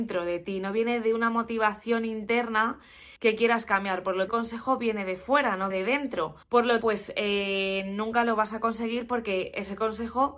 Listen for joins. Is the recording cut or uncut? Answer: cut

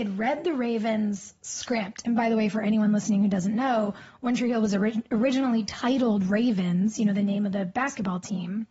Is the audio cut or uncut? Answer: uncut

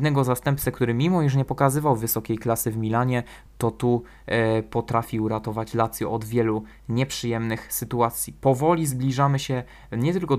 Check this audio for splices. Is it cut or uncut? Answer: uncut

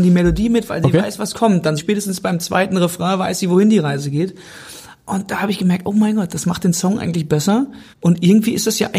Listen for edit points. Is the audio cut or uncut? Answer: cut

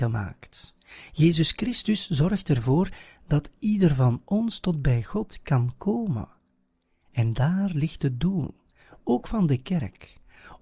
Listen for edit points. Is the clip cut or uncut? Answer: uncut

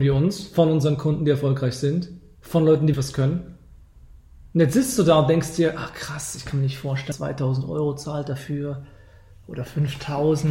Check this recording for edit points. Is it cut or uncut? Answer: cut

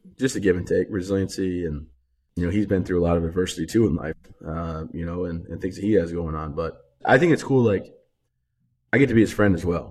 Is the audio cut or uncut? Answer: uncut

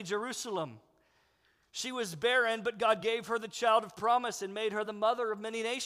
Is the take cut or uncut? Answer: uncut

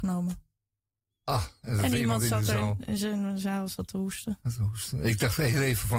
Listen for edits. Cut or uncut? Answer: uncut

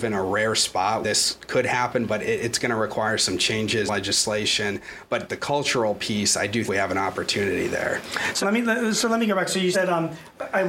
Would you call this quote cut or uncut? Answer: cut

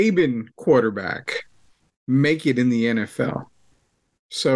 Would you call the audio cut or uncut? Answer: uncut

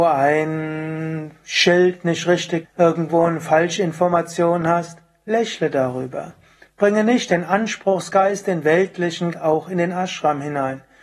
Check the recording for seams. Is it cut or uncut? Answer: cut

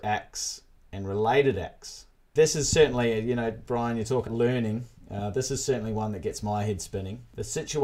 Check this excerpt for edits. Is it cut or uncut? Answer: cut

